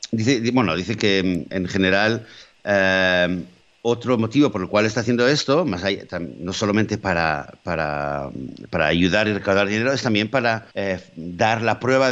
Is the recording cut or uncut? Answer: cut